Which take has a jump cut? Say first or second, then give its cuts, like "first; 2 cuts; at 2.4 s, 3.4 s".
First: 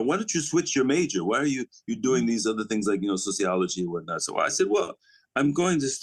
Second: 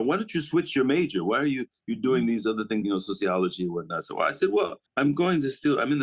second; 2 cuts; at 2.8 s, 4.9 s